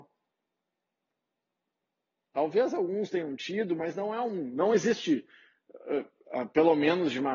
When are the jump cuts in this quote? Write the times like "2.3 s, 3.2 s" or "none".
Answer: none

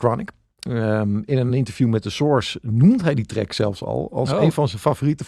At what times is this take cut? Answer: none

